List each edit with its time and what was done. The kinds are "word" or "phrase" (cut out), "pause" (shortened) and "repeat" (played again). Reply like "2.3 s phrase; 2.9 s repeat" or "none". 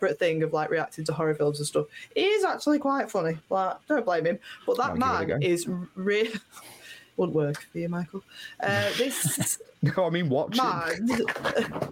none